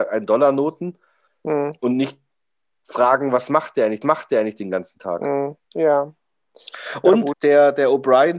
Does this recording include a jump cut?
yes; 3 cuts; at 4.0 s, 5.6 s, 7.3 s

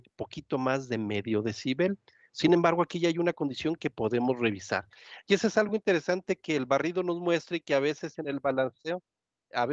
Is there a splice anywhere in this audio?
no; 0 cuts

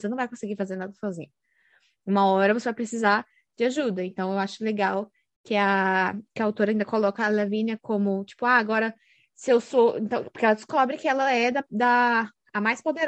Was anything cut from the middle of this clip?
no; 0 cuts

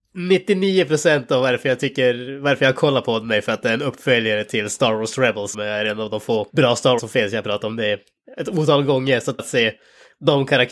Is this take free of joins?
no; 4 cuts; at 5.5 s, 6.5 s, 7.0 s, 9.4 s

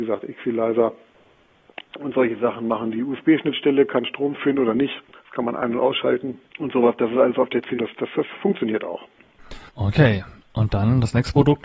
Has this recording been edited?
yes; 3 cuts; at 6.5 s, 7.8 s, 9.7 s

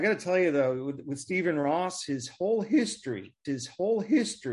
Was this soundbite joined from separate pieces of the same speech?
yes; 1 cut; at 3.4 s

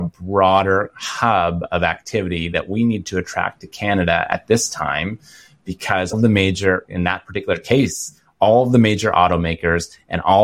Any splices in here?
yes; 1 cut; at 6.1 s

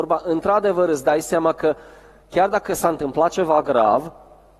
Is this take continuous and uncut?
yes; 0 cuts

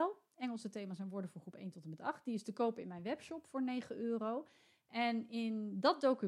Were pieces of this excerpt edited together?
no; 0 cuts

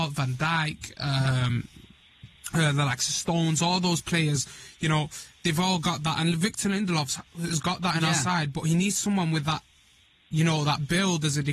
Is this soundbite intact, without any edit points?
yes; 0 cuts

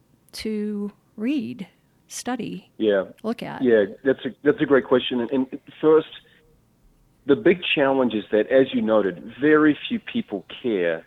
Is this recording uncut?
yes; 0 cuts

